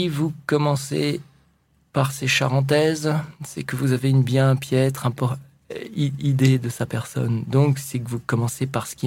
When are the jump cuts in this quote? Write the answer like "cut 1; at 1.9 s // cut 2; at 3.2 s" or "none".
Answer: none